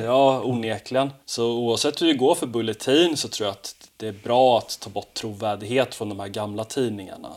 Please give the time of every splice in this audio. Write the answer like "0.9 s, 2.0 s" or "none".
1.2 s